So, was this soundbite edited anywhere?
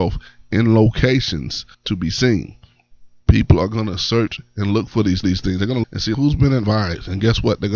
yes; 6 cuts; at 1.7 s, 3.2 s, 5.2 s, 5.8 s, 6.1 s, 6.6 s

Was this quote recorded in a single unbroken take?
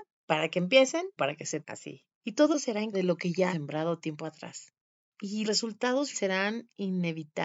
no; 7 cuts; at 1.2 s, 1.6 s, 2.5 s, 2.9 s, 3.5 s, 5.4 s, 6.1 s

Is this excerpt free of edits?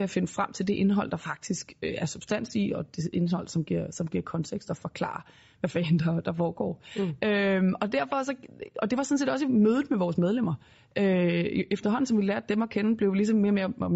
yes; 0 cuts

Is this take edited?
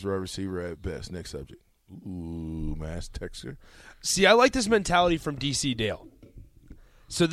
no; 0 cuts

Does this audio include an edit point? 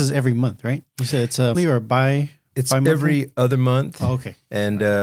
yes; 1 cut; at 1.5 s

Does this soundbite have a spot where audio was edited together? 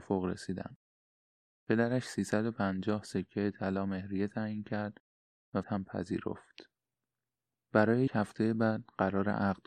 yes; 2 cuts; at 5.6 s, 8.1 s

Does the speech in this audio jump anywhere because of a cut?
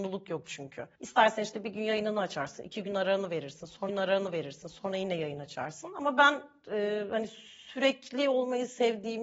yes; 2 cuts; at 0.9 s, 3.9 s

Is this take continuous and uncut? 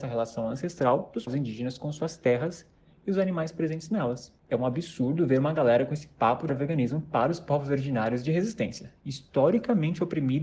no; 2 cuts; at 1.3 s, 6.5 s

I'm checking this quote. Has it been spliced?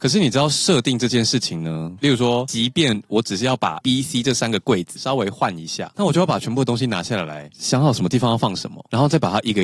yes; 1 cut; at 3.8 s

